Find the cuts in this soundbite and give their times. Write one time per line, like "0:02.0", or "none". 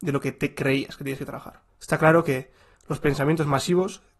none